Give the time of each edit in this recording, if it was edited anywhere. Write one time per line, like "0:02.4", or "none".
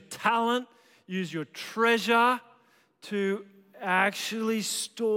none